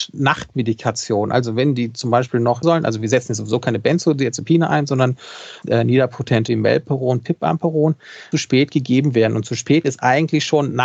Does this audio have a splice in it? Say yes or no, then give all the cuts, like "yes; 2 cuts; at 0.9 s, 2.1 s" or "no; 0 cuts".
yes; 4 cuts; at 2.6 s, 5.6 s, 6.5 s, 8.3 s